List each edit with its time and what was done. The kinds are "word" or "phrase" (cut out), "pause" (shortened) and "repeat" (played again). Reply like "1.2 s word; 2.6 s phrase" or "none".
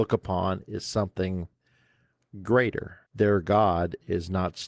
3.1 s pause